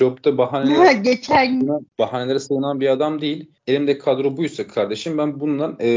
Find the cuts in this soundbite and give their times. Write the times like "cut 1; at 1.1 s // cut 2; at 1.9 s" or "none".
cut 1; at 1.9 s // cut 2; at 3.6 s